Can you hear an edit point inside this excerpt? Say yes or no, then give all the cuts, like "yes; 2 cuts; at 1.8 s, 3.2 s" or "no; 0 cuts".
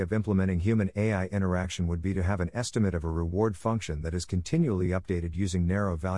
no; 0 cuts